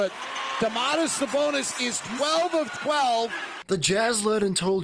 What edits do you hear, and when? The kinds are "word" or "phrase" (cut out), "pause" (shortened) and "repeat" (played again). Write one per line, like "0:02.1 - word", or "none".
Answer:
none